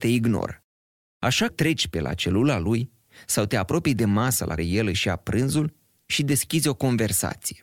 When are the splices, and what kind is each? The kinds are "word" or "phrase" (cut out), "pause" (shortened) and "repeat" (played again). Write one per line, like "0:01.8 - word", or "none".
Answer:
0:01.5 - word
0:04.6 - word